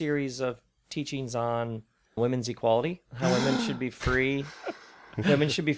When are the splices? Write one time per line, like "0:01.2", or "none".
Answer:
0:02.2
0:03.1